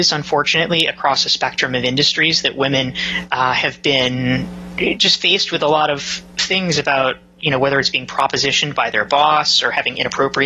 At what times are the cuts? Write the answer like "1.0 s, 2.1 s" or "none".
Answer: none

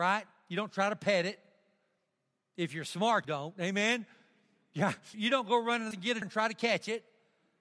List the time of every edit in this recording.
3.2 s, 5.1 s, 5.9 s, 6.2 s

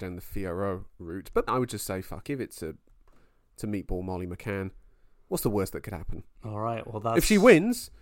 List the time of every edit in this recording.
1.5 s, 2.2 s

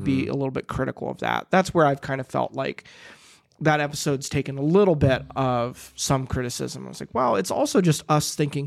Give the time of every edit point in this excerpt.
none

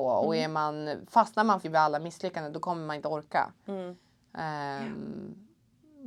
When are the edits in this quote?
1.6 s

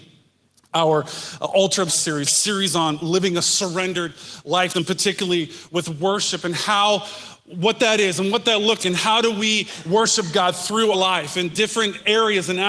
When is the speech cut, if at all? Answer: 1.9 s, 2.2 s, 4.7 s, 8.8 s, 10.9 s

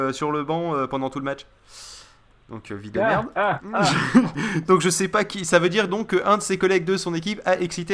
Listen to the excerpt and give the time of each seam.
none

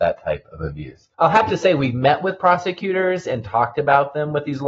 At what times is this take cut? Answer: 1.1 s

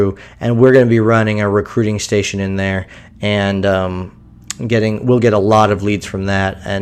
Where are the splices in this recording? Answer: none

